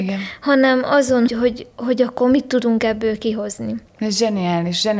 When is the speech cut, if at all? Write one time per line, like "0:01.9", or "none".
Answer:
0:01.3
0:03.9

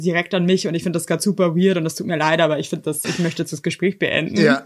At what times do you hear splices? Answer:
0:03.0

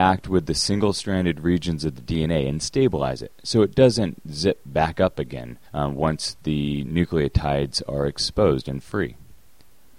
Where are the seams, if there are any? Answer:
0:05.7

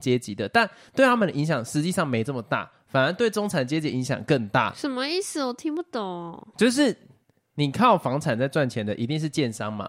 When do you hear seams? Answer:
none

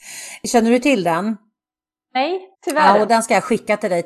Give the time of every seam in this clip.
0:02.5
0:03.1

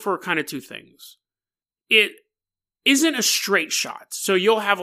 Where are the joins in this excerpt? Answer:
none

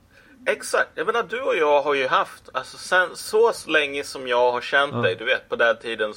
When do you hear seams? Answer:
none

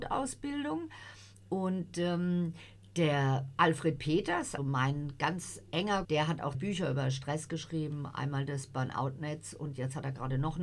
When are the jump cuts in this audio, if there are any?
0:04.6
0:06.0
0:06.5

